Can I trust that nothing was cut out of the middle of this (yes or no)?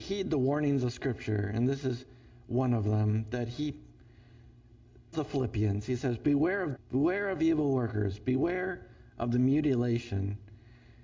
no